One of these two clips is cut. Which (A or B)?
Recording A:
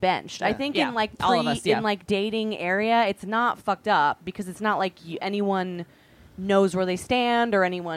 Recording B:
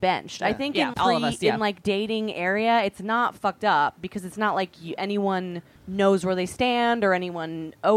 B